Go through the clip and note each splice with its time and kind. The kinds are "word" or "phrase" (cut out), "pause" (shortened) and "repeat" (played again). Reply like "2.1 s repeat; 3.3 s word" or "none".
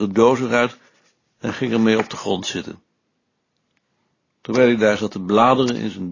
none